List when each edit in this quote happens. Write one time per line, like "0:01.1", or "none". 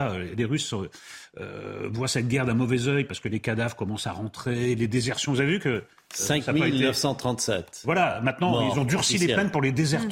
none